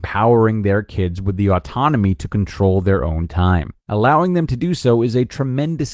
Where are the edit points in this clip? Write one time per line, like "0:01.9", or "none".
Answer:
0:03.8